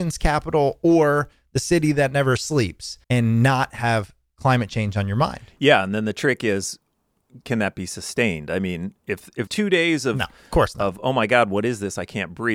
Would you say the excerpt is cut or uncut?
cut